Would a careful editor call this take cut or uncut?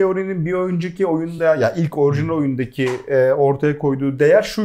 uncut